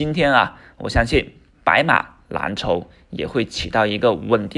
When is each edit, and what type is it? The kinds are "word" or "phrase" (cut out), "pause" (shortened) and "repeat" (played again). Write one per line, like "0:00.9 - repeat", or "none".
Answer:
0:01.5 - pause

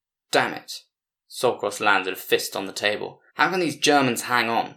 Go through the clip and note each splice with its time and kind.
0:03.3 - pause

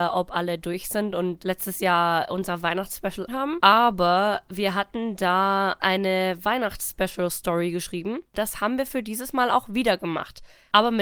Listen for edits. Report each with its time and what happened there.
0:03.3 - word
0:05.8 - word
0:08.3 - pause

